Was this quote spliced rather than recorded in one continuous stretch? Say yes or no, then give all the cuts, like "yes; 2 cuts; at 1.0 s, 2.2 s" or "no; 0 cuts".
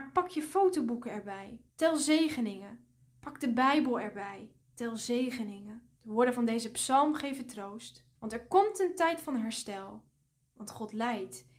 yes; 4 cuts; at 1.7 s, 4.6 s, 6.0 s, 8.2 s